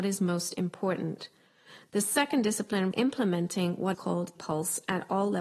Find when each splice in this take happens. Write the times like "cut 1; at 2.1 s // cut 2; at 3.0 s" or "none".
cut 1; at 2.9 s // cut 2; at 3.9 s // cut 3; at 4.3 s